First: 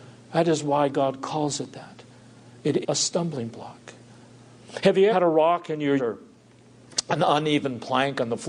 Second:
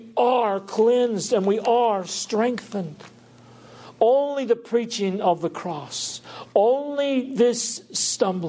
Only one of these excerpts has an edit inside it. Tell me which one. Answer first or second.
first